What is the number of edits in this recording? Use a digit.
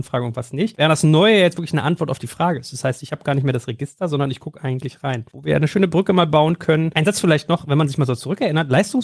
1